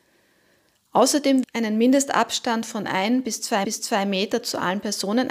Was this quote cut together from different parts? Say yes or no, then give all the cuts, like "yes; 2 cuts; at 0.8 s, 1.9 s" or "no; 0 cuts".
yes; 2 cuts; at 1.4 s, 3.6 s